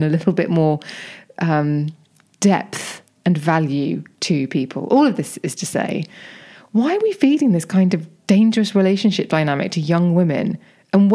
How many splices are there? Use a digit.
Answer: 0